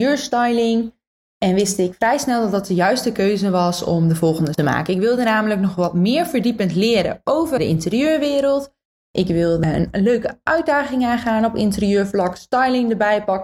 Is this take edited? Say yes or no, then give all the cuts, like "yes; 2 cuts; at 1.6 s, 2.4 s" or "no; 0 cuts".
yes; 2 cuts; at 4.5 s, 7.6 s